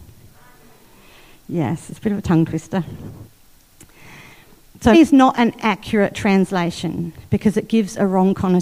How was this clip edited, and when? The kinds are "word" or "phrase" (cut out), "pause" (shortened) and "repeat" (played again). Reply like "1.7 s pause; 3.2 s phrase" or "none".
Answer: 4.9 s word